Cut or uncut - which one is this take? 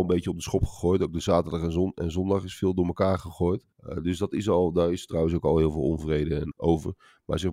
cut